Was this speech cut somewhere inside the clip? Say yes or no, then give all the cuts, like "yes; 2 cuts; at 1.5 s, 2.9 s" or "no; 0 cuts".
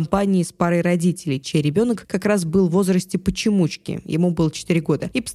no; 0 cuts